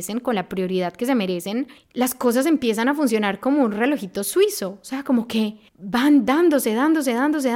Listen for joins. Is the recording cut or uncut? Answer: cut